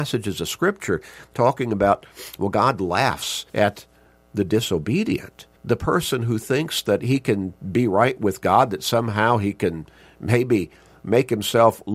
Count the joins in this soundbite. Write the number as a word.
two